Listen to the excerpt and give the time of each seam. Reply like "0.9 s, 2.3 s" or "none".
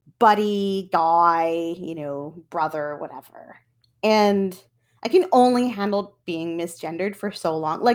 none